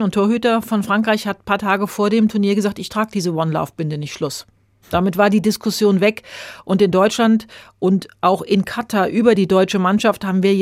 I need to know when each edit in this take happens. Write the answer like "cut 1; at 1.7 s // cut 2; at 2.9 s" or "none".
none

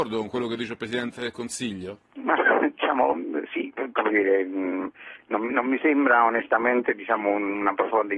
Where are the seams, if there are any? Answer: cut 1; at 2.1 s

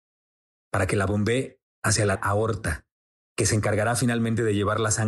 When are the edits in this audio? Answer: cut 1; at 1.7 s // cut 2; at 2.2 s

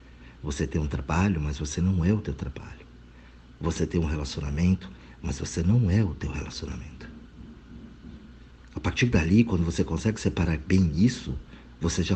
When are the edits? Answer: none

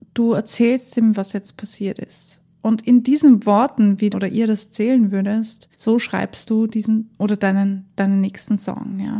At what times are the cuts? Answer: cut 1; at 4.1 s // cut 2; at 5.7 s // cut 3; at 7.1 s

